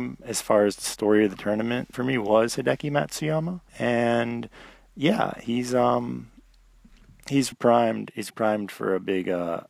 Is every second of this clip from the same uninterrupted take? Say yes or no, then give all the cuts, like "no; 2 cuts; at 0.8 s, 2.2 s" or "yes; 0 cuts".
no; 4 cuts; at 1.9 s, 3.7 s, 7.5 s, 8.3 s